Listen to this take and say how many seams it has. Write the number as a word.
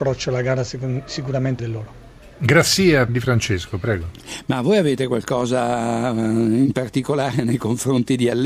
two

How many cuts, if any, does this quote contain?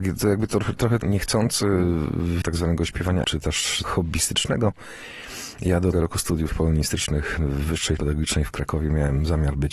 eight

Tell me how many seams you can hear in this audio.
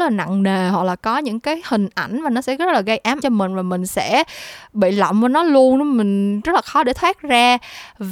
one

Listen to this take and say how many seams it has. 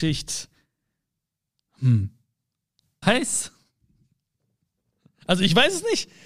one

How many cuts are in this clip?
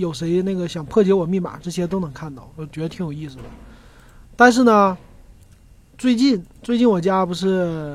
zero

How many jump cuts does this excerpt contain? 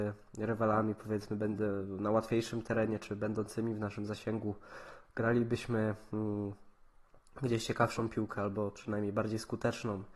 zero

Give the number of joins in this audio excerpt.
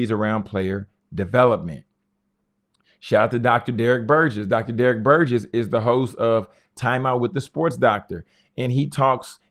zero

